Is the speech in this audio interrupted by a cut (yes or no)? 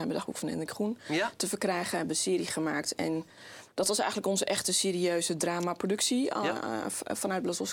no